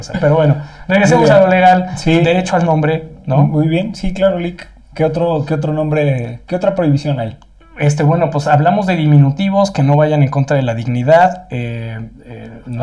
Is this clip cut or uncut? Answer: uncut